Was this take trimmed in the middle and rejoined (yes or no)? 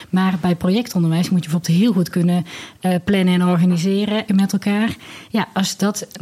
yes